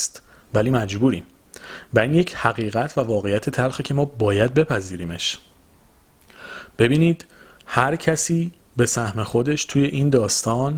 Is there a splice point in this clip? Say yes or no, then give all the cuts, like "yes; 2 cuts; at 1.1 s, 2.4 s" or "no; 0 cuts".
no; 0 cuts